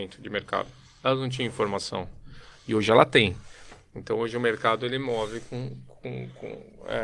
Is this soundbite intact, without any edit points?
yes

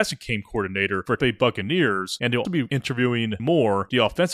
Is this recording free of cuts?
no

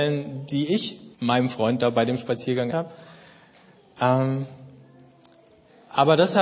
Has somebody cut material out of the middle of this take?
yes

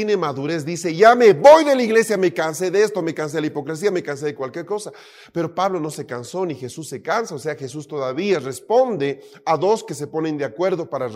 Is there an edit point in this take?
no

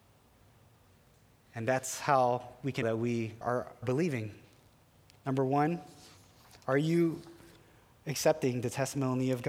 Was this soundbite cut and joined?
yes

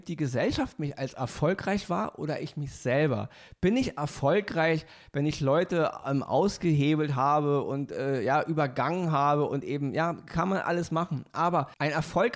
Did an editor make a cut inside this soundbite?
no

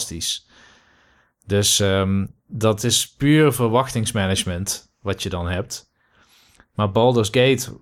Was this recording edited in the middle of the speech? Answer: no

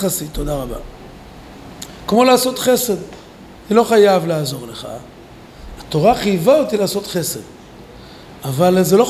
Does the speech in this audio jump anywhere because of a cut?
no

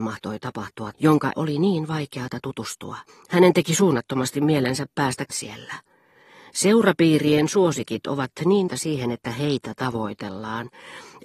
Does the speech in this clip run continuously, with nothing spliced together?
no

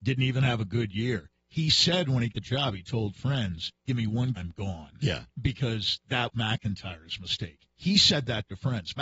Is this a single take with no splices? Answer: no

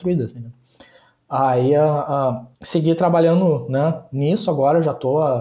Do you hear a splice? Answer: yes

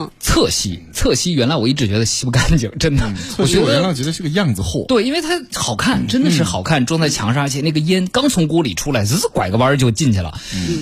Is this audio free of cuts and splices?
yes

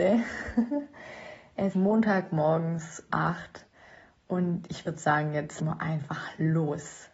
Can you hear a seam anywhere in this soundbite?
yes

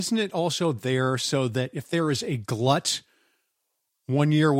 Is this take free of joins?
yes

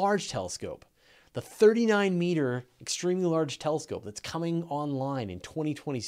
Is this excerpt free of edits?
yes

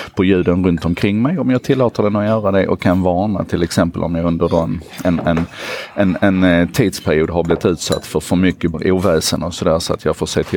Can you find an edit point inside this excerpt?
yes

